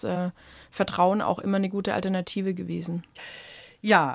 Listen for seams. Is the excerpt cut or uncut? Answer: uncut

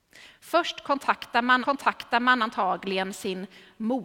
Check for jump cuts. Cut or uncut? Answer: cut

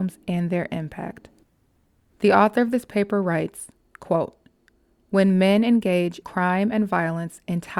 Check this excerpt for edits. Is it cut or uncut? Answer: cut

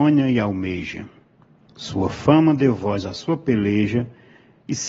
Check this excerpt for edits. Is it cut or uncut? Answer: uncut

